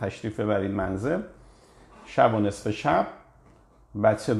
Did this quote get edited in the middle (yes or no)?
no